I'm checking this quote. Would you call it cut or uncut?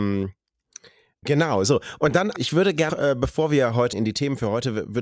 cut